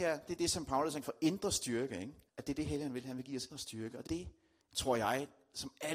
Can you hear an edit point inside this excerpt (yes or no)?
yes